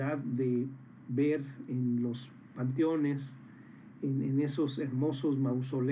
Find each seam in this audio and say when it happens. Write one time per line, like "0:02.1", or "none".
none

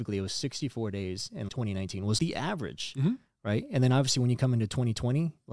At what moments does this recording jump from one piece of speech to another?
0:01.5
0:02.2

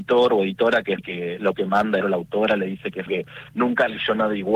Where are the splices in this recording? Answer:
0:01.0
0:01.5
0:02.0
0:03.1

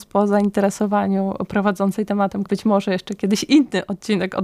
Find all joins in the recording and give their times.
0:02.5

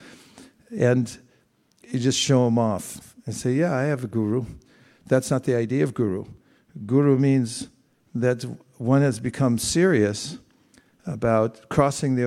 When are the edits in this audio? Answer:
none

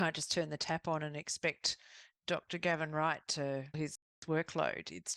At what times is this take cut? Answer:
0:03.7

